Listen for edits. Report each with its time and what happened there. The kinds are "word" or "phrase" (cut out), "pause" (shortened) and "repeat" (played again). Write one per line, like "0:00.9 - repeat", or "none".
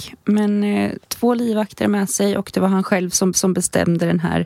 0:01.0 - pause
0:03.3 - repeat